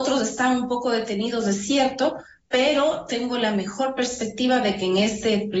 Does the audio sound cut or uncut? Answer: uncut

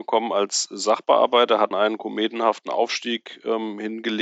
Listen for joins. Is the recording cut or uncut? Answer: cut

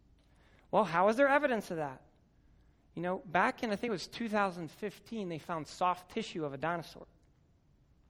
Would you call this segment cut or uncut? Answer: uncut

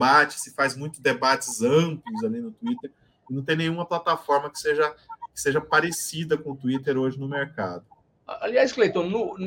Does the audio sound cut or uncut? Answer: uncut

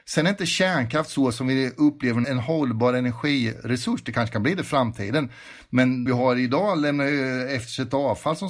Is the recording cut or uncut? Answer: cut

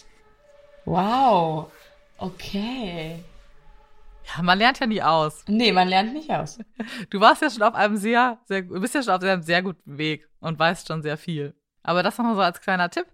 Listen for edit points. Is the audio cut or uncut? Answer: uncut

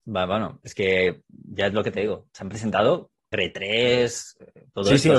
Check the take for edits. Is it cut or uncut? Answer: cut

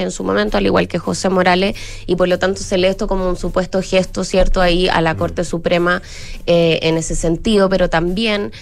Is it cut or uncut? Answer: uncut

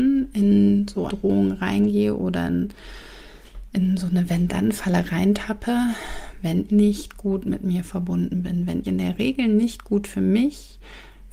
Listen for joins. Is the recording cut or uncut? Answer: cut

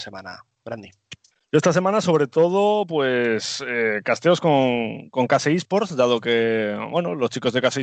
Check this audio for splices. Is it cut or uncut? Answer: uncut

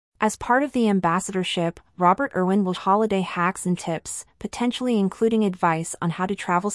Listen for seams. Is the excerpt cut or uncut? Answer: cut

